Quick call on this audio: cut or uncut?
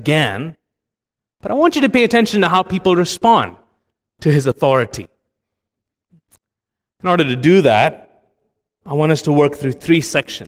uncut